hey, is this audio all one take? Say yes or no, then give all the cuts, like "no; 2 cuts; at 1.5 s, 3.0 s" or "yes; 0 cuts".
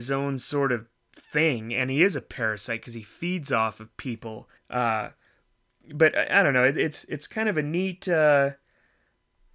no; 1 cut; at 4.6 s